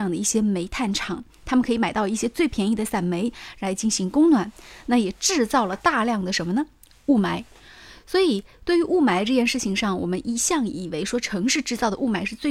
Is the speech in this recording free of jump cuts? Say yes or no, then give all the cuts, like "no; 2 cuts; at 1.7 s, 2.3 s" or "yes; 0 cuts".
yes; 0 cuts